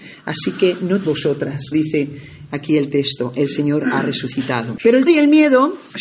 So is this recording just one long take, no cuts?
no; 3 cuts; at 1.0 s, 1.7 s, 5.1 s

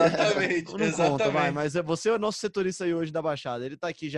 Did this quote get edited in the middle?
no; 0 cuts

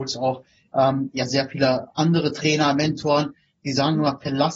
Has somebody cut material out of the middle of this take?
no; 0 cuts

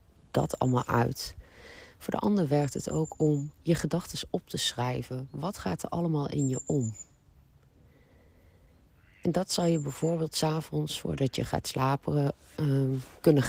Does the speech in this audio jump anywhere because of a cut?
no; 0 cuts

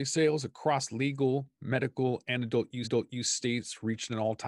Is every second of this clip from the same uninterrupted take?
no; 2 cuts; at 1.5 s, 2.8 s

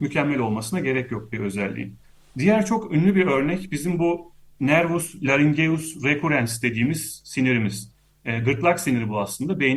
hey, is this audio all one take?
yes; 0 cuts

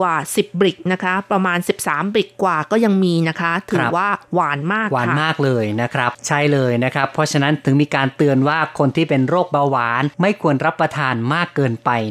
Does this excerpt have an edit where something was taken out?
yes; 2 cuts; at 6.2 s, 10.1 s

